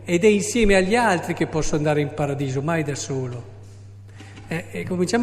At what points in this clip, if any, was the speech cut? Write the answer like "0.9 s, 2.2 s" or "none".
none